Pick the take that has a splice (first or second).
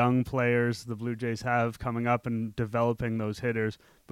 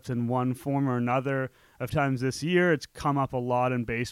second